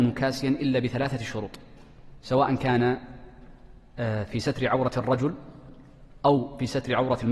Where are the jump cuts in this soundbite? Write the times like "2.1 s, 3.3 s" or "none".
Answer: none